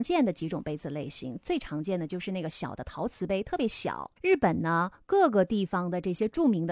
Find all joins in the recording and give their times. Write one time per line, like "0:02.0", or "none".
0:04.2